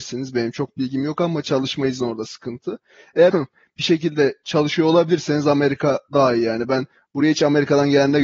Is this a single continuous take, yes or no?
no